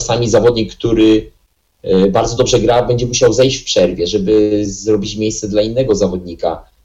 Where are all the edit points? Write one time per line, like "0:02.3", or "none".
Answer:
none